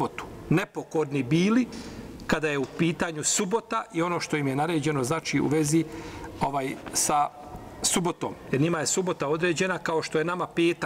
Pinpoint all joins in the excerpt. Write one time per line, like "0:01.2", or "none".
none